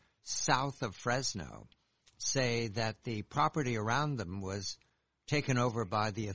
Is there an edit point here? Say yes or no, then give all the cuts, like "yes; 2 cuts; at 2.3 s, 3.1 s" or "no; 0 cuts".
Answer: no; 0 cuts